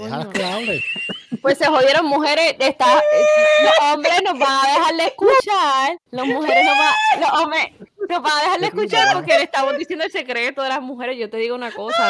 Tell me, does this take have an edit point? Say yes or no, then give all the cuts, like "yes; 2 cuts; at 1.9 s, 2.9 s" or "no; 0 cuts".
yes; 1 cut; at 6.1 s